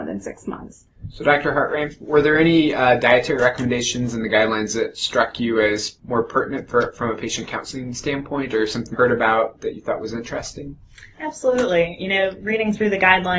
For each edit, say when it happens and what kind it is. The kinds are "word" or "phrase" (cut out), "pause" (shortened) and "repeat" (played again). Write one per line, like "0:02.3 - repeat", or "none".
0:08.9 - phrase